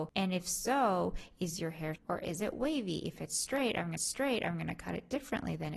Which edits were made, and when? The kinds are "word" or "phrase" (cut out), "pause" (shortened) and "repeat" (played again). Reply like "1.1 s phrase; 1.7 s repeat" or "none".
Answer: 1.9 s word; 4.0 s repeat

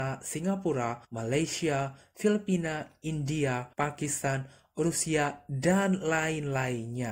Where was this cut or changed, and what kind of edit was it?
1.0 s pause; 3.7 s pause

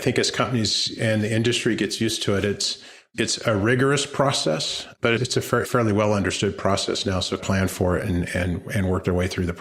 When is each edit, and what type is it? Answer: 5.2 s word; 5.6 s phrase; 7.4 s phrase; 8.3 s word

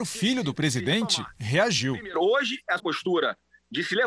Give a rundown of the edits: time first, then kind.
2.8 s word

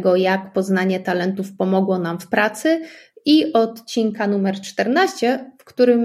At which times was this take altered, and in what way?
none

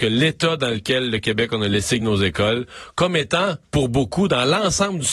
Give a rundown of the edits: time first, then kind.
2.0 s word; 3.6 s pause

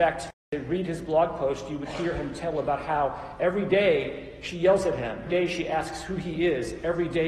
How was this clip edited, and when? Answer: 5.3 s word

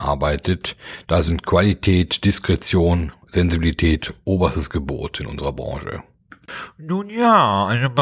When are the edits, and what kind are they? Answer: none

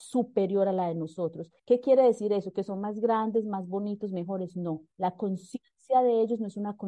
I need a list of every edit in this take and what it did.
1.6 s pause; 4.9 s pause

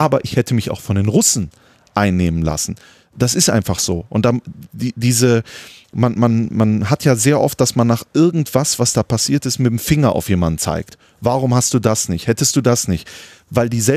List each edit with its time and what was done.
none

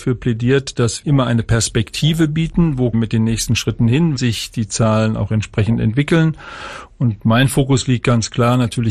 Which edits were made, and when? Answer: 1.0 s word; 2.9 s phrase; 4.2 s word

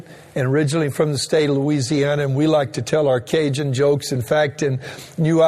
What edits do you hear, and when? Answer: none

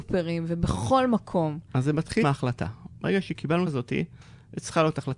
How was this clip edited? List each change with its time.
2.2 s word; 3.7 s phrase

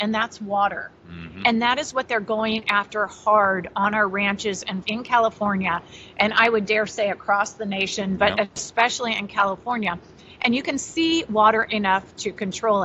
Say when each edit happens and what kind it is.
4.8 s word

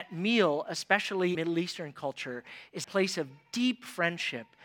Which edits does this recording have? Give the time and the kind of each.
1.3 s word; 2.8 s word

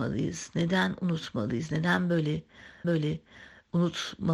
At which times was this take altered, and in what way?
2.8 s repeat

